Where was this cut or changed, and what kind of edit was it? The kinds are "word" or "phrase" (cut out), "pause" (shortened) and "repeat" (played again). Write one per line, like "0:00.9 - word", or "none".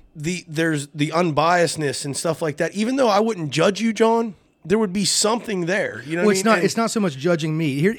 none